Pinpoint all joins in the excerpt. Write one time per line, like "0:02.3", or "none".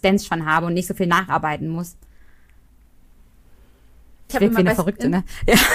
0:04.3